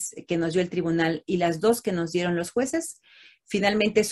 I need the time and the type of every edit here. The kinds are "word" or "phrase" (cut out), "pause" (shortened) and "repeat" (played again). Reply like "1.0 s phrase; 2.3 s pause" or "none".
none